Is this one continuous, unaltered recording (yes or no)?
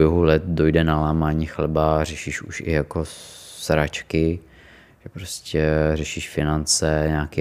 yes